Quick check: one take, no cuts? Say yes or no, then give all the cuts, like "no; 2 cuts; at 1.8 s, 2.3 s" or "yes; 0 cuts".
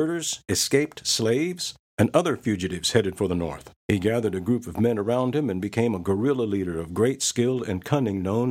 no; 2 cuts; at 1.8 s, 3.8 s